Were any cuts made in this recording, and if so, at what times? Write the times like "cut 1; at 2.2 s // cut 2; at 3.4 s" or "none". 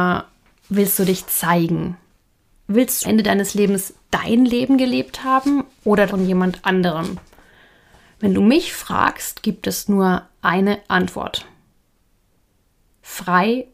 cut 1; at 3.0 s // cut 2; at 6.1 s